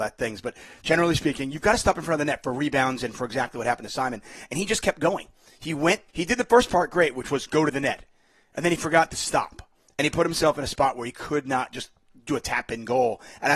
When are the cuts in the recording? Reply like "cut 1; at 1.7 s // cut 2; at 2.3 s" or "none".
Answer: cut 1; at 6.1 s